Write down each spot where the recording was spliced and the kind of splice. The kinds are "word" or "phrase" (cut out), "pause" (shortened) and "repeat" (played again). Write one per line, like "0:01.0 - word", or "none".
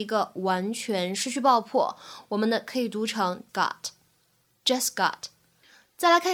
0:03.5 - word